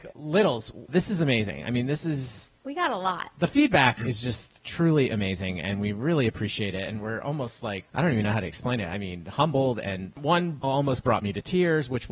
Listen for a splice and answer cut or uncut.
cut